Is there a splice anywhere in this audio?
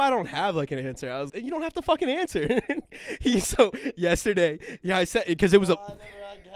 yes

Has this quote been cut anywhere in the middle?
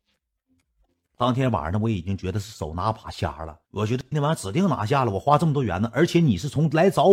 yes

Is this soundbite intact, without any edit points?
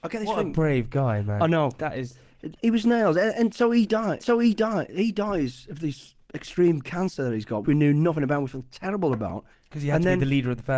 no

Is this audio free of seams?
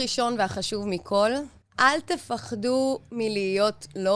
no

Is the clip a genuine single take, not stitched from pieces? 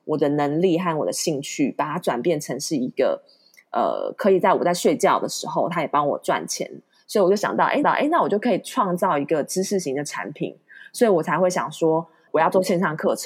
no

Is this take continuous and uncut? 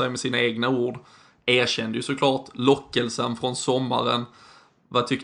yes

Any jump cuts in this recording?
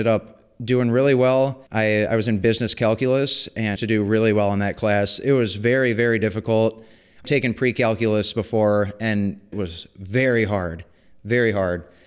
yes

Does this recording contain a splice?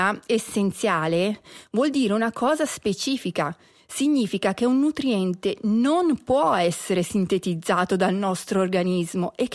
no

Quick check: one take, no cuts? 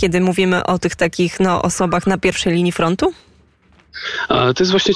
yes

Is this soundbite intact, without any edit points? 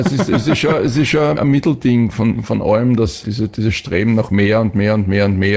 no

